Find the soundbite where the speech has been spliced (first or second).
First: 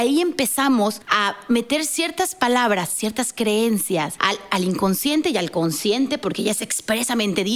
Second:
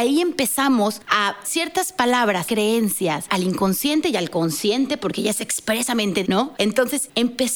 second